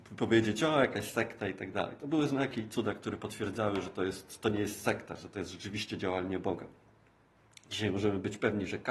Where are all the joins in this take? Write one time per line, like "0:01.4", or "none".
none